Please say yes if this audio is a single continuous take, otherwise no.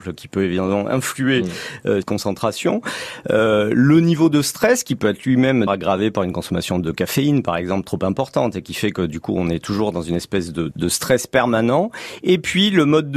no